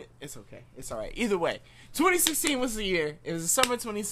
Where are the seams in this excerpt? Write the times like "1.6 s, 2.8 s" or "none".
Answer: none